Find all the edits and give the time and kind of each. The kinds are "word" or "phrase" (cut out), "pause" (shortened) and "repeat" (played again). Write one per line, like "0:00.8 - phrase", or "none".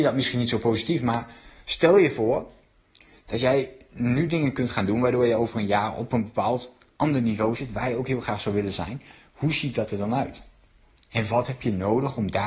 none